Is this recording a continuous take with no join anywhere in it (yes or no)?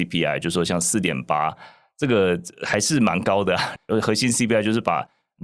yes